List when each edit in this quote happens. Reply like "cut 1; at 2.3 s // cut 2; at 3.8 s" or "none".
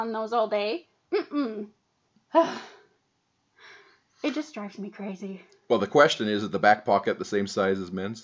none